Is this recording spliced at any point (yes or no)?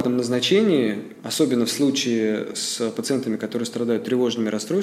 no